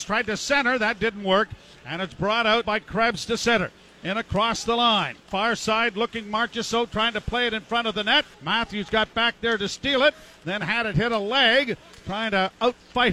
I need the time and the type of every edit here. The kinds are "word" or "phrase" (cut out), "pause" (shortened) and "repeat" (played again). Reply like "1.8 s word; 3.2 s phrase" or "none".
2.6 s word; 8.3 s pause